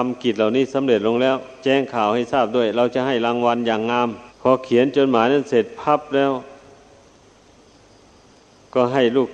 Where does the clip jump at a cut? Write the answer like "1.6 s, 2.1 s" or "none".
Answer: 4.3 s